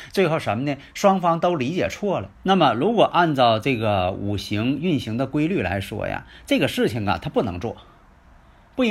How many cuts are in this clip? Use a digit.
1